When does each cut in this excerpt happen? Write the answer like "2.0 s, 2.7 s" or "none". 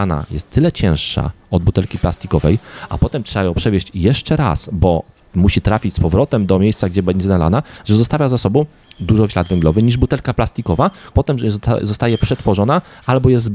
9.3 s, 11.1 s